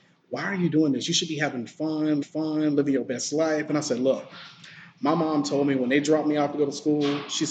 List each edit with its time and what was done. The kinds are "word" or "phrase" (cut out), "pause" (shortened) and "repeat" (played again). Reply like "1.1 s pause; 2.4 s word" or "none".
2.2 s repeat